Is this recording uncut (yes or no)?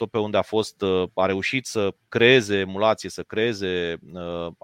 yes